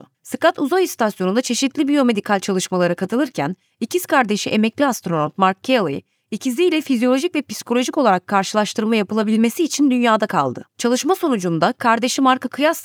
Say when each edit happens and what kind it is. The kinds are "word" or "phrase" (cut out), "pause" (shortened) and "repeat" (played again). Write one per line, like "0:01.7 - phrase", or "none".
none